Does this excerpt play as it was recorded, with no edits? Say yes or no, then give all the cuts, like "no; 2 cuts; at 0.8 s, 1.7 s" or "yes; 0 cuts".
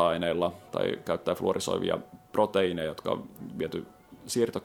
yes; 0 cuts